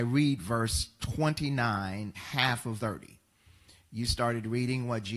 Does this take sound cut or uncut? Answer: cut